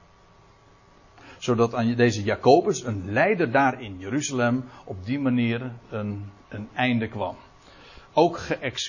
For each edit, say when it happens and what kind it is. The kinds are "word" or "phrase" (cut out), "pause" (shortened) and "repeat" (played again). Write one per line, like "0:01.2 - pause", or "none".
none